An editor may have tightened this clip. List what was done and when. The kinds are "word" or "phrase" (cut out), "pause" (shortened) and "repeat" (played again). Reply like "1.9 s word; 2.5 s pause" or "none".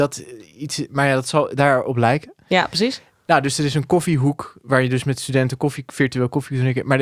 none